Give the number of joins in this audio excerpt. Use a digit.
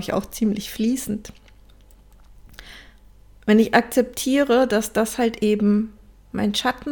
0